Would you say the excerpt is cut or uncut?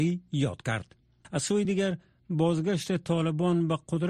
uncut